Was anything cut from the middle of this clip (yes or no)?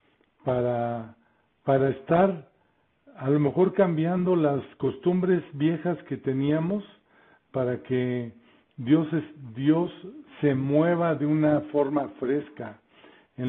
no